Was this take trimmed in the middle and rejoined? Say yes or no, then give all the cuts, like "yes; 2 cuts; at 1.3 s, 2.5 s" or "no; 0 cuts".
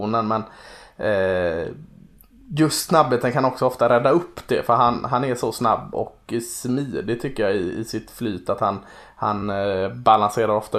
no; 0 cuts